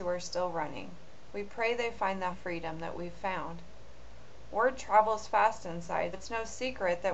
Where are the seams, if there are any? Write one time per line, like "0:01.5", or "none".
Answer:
0:02.3
0:06.1